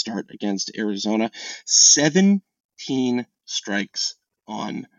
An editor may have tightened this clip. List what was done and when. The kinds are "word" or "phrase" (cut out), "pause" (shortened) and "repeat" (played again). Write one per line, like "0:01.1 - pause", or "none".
0:03.3 - word